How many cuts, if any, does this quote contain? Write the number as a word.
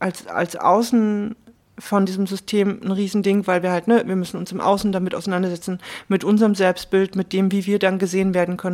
zero